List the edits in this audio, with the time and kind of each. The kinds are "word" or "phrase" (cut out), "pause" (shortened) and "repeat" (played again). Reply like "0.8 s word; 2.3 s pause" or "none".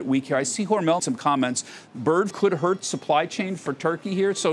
1.0 s word; 2.3 s word